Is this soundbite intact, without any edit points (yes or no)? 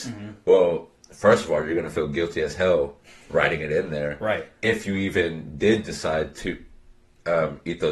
yes